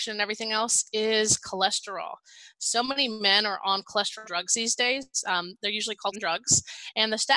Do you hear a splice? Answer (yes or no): yes